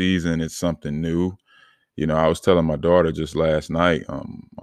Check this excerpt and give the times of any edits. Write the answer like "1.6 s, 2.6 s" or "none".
none